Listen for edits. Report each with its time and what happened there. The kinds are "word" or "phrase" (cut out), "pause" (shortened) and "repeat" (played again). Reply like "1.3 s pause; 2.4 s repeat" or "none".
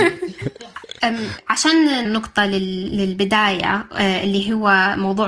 2.0 s word